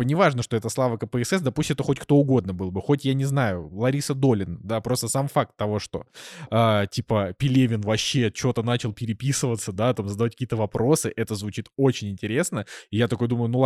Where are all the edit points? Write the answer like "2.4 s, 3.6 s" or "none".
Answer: none